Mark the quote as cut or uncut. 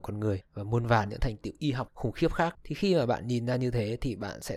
uncut